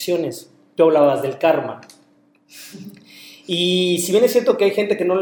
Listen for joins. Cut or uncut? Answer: uncut